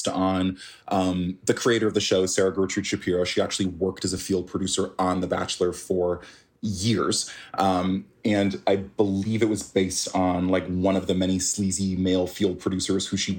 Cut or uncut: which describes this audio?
uncut